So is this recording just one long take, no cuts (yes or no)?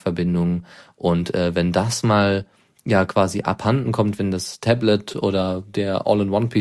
yes